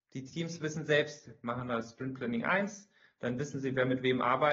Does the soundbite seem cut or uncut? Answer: uncut